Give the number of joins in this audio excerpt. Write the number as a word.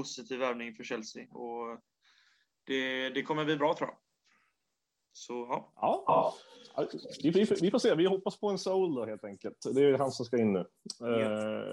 zero